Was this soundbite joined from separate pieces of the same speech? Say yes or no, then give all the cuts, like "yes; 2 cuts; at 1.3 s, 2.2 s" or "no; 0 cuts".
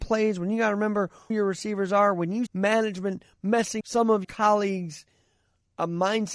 yes; 4 cuts; at 1.3 s, 2.5 s, 3.8 s, 4.2 s